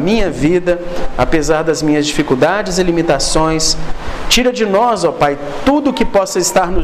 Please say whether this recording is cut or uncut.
uncut